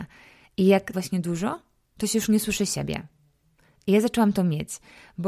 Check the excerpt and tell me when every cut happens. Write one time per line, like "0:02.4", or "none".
0:00.9